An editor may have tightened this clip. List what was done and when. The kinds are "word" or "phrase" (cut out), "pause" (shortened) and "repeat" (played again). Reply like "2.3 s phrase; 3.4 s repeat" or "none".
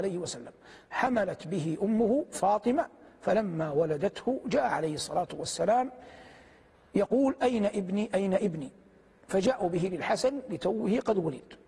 none